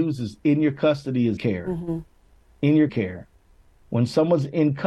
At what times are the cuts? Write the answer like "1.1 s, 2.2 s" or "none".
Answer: 1.4 s, 2.9 s